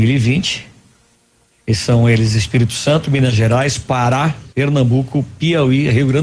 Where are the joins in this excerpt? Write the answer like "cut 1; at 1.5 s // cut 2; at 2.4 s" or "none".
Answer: cut 1; at 4.5 s